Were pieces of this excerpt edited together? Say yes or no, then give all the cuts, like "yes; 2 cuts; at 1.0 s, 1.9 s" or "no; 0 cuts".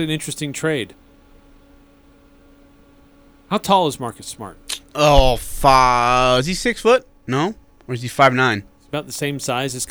no; 0 cuts